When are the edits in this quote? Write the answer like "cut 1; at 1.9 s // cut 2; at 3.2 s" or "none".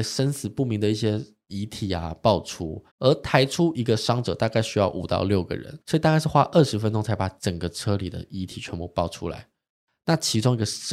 cut 1; at 2.9 s // cut 2; at 5.8 s